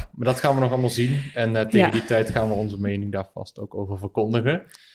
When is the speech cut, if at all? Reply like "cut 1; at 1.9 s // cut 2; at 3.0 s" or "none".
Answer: none